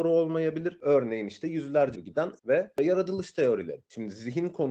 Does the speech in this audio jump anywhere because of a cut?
yes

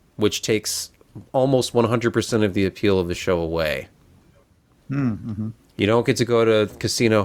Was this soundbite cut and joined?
no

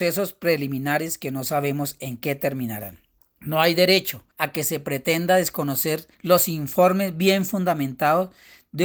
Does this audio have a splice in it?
yes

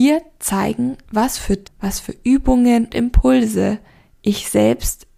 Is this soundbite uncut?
no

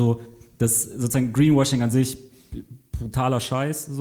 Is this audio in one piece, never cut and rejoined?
yes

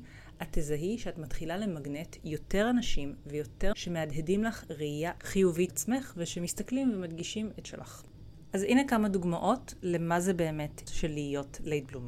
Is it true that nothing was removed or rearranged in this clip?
no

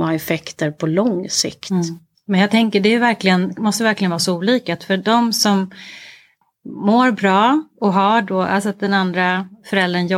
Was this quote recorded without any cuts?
yes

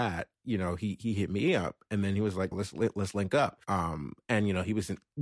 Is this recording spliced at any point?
yes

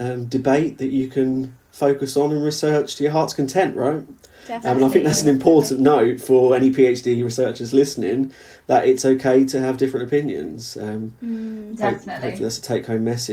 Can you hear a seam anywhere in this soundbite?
no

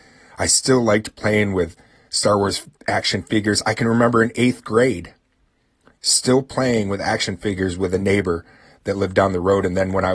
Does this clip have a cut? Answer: no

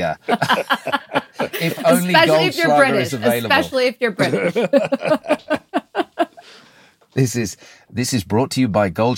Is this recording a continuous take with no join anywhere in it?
yes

